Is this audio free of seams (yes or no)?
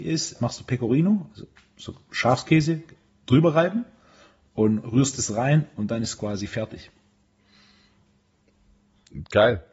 yes